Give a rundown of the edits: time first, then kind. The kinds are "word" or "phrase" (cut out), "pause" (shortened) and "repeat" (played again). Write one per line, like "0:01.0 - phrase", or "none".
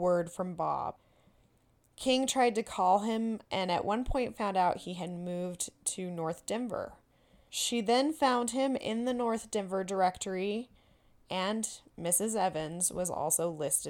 none